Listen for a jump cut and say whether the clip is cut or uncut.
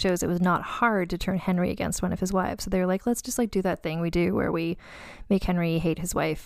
uncut